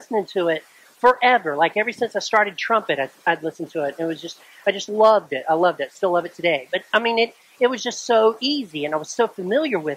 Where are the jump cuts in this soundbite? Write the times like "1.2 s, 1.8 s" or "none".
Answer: none